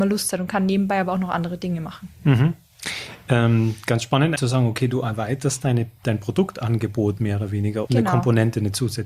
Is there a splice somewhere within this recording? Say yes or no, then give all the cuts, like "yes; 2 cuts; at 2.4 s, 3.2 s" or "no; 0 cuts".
yes; 2 cuts; at 4.4 s, 7.9 s